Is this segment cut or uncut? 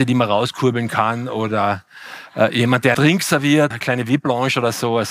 cut